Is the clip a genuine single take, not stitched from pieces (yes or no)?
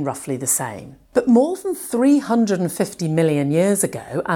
no